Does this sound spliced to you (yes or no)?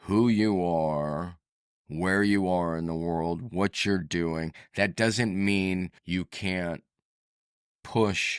yes